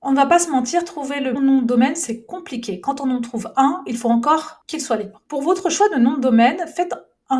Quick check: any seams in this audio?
yes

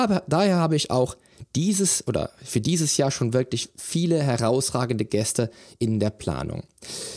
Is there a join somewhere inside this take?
no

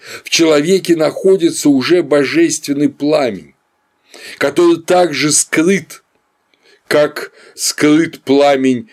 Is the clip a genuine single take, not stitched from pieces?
yes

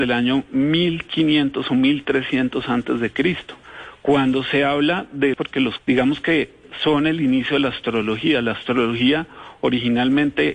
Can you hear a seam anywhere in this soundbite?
yes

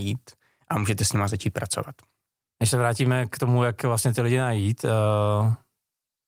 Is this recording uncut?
yes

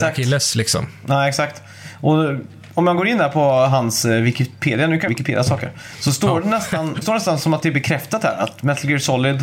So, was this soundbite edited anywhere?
yes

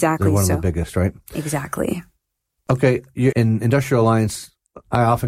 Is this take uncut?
no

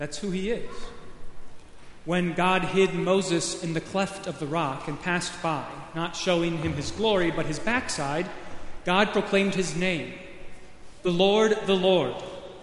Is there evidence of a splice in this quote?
no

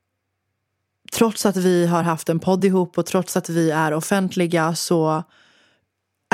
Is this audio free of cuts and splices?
yes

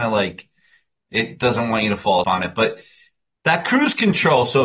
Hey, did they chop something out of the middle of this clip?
yes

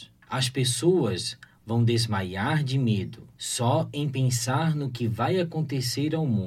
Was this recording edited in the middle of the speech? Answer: no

